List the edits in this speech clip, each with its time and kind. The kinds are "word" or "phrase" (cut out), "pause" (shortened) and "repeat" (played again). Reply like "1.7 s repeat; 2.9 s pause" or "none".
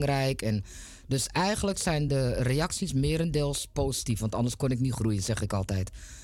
none